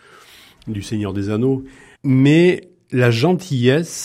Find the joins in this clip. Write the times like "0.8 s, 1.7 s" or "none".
none